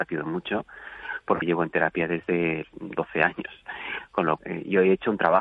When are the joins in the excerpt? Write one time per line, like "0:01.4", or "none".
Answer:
0:01.4
0:02.6
0:04.4